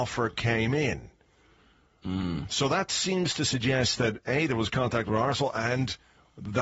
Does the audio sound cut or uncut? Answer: uncut